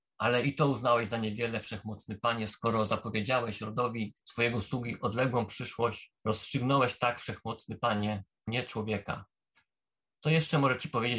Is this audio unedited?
no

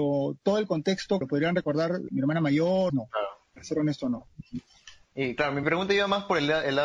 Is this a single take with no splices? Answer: no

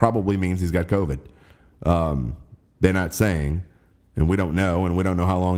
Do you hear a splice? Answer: no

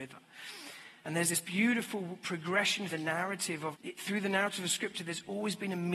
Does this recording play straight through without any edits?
no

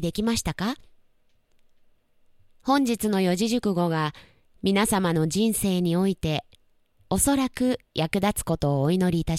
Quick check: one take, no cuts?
yes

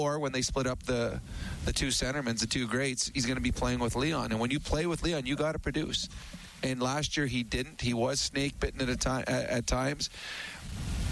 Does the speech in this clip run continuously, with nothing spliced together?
yes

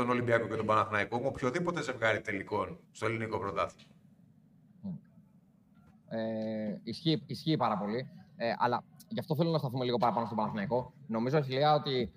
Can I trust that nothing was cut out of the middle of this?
no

